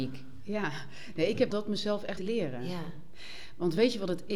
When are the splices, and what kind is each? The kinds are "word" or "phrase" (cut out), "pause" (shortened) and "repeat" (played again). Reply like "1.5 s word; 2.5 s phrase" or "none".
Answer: 1.5 s word; 2.2 s word

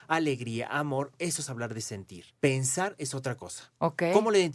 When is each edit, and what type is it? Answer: none

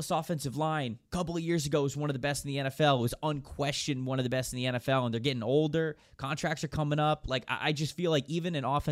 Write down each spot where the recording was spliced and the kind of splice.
1.1 s pause

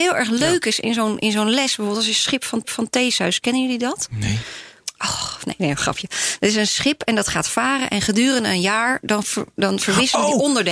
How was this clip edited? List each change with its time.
2.6 s repeat; 9.2 s word

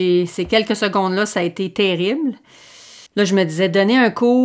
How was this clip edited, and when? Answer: 3.1 s pause

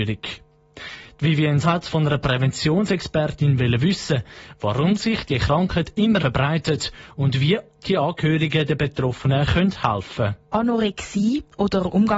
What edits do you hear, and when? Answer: 1.6 s word; 6.2 s word; 10.5 s pause

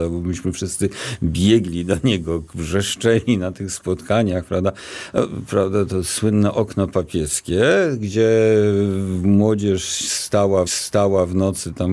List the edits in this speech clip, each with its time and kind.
10.7 s repeat

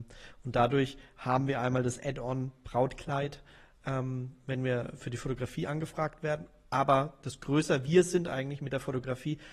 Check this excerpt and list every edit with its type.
none

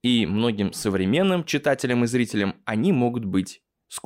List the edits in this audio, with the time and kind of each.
none

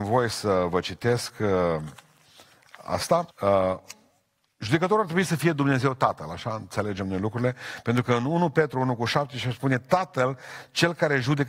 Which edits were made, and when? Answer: 3.3 s pause

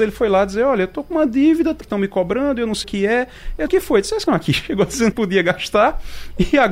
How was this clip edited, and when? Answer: 1.8 s word; 2.8 s word; 3.7 s phrase; 4.3 s word; 5.1 s word

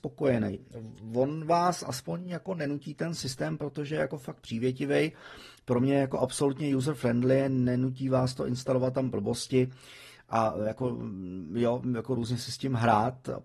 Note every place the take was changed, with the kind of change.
none

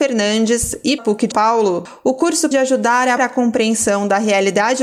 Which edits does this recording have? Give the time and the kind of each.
1.0 s word; 1.3 s word; 2.5 s word; 3.2 s word

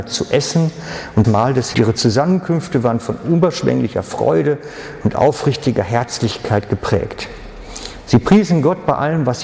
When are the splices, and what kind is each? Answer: 1.2 s word; 1.7 s phrase

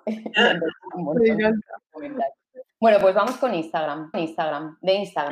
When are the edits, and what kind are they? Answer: 0.9 s word; 2.7 s pause; 4.1 s repeat

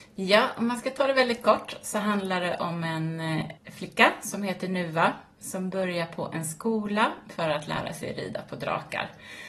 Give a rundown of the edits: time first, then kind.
3.6 s pause

